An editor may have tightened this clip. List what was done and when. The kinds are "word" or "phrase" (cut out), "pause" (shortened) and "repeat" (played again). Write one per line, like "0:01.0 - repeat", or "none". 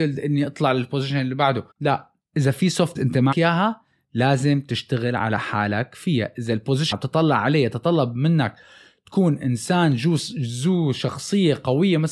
0:01.7 - pause
0:03.0 - word
0:03.3 - word
0:06.9 - word